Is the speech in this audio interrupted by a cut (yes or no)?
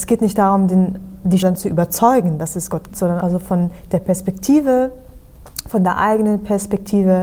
yes